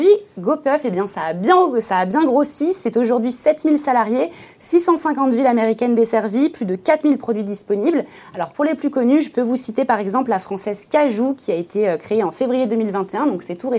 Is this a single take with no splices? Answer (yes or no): yes